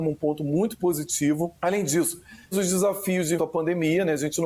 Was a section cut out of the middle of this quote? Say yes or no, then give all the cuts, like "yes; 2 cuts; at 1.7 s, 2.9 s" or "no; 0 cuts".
yes; 3 cuts; at 1.6 s, 2.5 s, 3.4 s